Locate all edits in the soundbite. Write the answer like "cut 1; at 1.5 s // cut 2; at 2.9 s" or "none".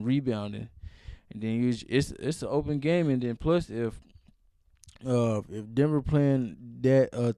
none